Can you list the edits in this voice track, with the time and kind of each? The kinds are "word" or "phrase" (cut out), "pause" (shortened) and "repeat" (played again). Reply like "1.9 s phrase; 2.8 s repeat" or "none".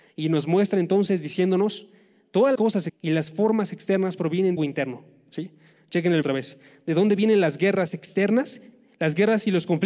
2.5 s word; 2.9 s word; 4.6 s word; 6.2 s word